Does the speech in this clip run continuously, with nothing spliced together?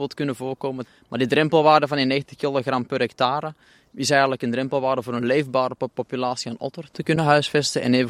yes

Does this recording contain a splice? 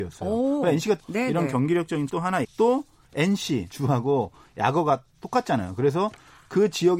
yes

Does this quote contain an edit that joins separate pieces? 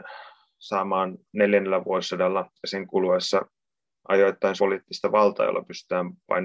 yes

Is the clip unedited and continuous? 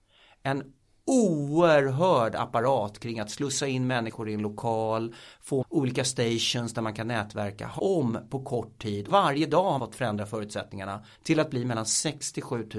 no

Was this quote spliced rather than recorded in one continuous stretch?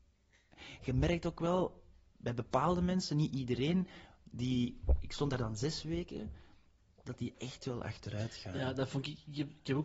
no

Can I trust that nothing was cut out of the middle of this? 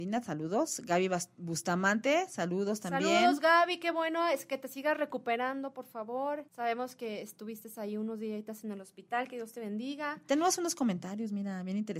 no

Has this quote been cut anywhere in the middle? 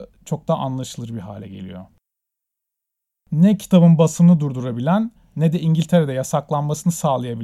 no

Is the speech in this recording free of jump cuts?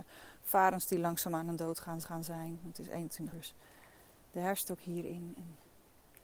no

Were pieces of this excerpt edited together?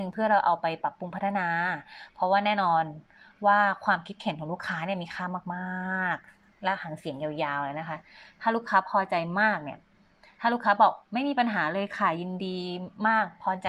no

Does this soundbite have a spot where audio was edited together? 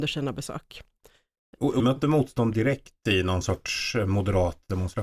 yes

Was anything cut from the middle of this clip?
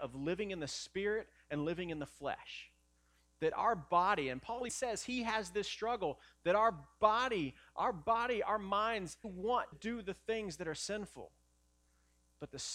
yes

